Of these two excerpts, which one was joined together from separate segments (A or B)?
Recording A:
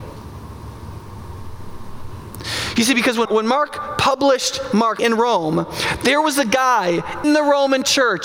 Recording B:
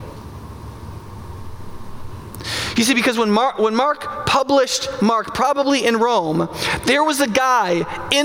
A